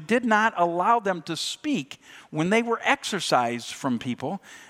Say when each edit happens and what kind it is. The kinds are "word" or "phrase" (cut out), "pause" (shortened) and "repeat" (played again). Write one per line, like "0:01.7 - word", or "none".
none